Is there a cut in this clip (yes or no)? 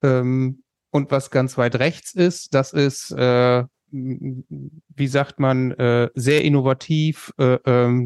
no